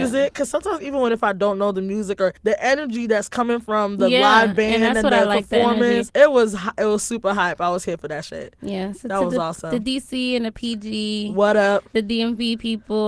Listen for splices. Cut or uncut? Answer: cut